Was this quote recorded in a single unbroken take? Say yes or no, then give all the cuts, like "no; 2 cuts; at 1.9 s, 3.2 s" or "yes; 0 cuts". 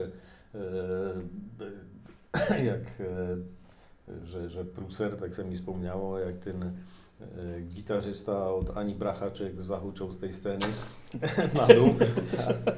yes; 0 cuts